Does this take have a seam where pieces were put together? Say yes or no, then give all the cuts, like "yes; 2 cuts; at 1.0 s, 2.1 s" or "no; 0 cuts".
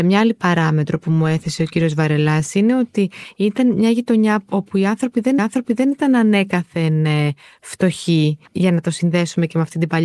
yes; 2 cuts; at 5.4 s, 8.5 s